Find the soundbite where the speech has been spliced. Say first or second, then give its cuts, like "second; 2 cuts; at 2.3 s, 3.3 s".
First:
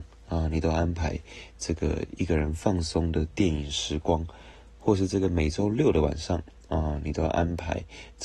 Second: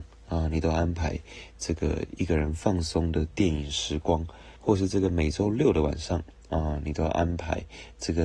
second; 1 cut; at 4.6 s